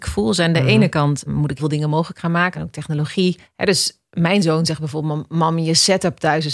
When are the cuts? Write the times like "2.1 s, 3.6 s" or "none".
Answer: 1.3 s, 1.6 s, 2.5 s, 3.4 s, 4.1 s